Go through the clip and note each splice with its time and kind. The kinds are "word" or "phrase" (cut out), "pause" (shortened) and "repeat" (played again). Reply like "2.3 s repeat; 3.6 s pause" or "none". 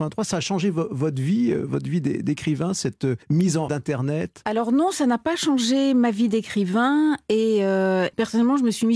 3.2 s pause; 3.7 s phrase